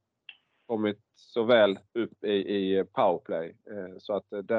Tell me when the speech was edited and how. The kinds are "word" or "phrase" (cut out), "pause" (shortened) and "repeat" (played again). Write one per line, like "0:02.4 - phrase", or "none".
0:01.9 - pause